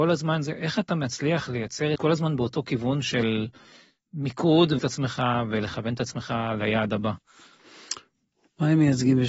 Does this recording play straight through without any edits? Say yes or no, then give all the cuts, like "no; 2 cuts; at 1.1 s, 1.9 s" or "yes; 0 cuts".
no; 2 cuts; at 2.0 s, 4.8 s